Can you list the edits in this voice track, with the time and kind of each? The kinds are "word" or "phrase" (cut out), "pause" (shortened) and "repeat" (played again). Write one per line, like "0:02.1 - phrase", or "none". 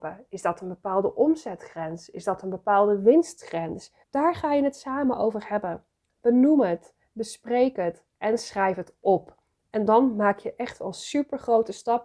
0:04.0 - pause